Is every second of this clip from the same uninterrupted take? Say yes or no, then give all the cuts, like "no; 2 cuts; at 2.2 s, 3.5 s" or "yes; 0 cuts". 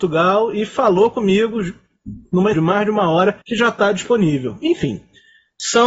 no; 2 cuts; at 2.5 s, 3.4 s